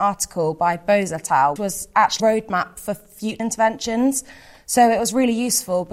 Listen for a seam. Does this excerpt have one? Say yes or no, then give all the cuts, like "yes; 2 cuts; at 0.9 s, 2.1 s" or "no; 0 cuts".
yes; 3 cuts; at 1.6 s, 2.2 s, 3.4 s